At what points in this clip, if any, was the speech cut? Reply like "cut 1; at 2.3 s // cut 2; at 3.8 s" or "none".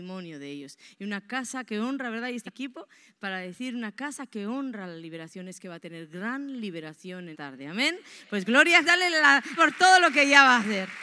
cut 1; at 2.5 s // cut 2; at 7.3 s // cut 3; at 8.8 s // cut 4; at 9.6 s